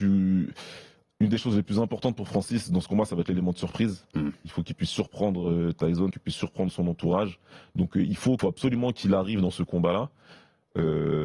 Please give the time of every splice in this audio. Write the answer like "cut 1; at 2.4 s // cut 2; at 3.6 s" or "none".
cut 1; at 6.1 s // cut 2; at 8.4 s